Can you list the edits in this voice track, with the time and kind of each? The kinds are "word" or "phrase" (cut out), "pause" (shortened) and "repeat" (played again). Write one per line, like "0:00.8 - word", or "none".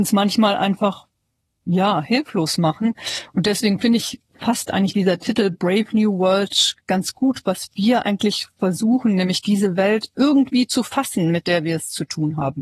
none